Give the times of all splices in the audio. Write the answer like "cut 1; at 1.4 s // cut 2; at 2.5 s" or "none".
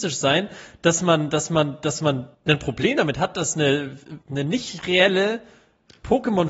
cut 1; at 2.3 s // cut 2; at 4.2 s